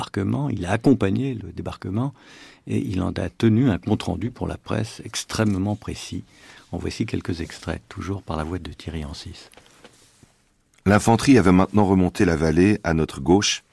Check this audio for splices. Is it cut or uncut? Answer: uncut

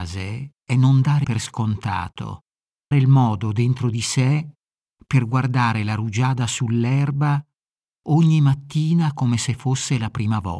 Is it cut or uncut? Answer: cut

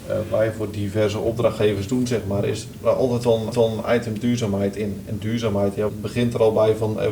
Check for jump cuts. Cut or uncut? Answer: cut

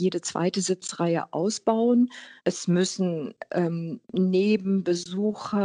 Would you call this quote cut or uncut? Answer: cut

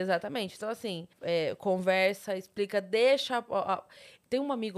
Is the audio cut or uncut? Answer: cut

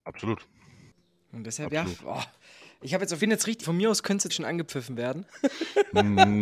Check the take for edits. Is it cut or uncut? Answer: cut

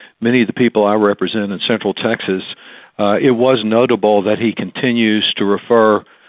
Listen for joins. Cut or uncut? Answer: uncut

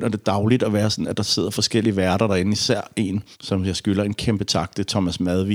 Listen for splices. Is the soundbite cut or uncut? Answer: cut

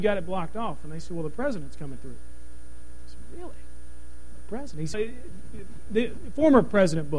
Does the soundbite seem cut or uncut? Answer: cut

